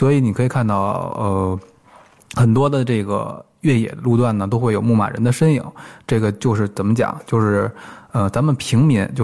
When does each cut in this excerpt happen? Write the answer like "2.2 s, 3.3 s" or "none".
none